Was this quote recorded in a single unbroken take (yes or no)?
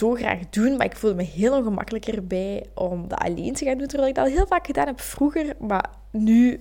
yes